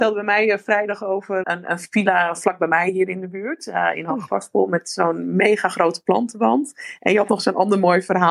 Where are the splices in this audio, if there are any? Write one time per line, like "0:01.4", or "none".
0:01.4